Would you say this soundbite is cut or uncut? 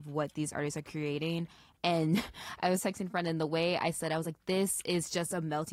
uncut